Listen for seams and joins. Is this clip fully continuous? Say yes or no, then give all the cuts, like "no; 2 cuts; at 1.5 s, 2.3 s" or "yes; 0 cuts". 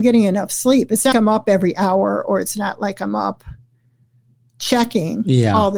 no; 1 cut; at 1.1 s